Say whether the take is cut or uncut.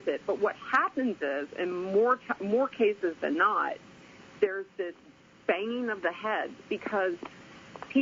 uncut